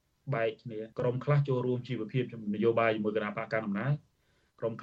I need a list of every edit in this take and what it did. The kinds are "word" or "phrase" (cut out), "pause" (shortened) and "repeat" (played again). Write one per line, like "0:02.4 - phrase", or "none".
0:00.9 - pause